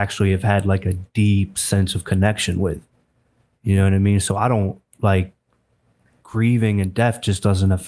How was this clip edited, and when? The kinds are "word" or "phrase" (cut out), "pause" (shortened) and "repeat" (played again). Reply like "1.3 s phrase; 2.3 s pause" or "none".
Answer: none